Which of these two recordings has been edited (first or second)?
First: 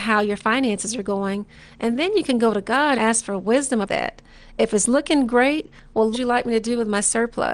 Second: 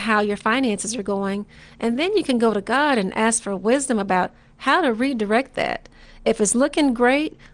first